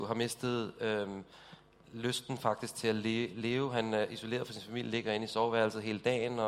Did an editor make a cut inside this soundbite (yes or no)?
no